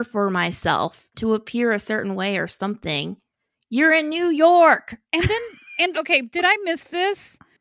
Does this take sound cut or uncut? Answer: cut